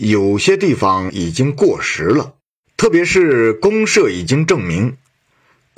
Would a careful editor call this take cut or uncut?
cut